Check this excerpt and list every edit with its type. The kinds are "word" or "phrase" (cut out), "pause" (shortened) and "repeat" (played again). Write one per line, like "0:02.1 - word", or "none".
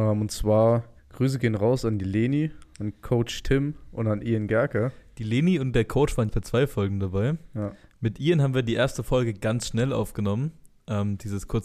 0:01.0 - pause
0:06.3 - word